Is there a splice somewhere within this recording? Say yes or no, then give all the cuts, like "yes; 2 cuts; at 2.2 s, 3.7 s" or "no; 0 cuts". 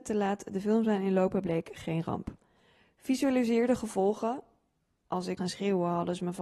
yes; 1 cut; at 5.4 s